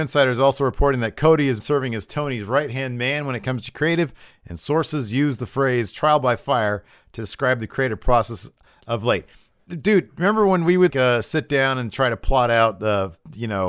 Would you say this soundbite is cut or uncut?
cut